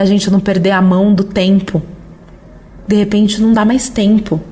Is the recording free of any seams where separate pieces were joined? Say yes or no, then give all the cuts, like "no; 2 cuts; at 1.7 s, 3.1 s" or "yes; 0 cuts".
yes; 0 cuts